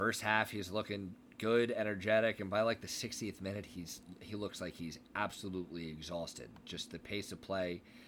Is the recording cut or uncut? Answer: uncut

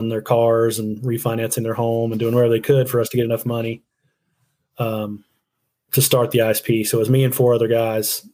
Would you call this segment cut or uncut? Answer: uncut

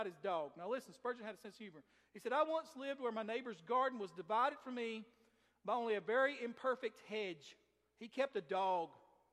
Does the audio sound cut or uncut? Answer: uncut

